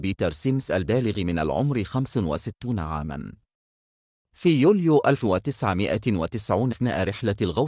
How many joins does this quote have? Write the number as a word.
one